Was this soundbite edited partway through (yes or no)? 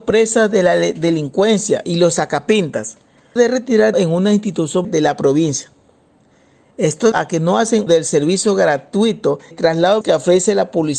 yes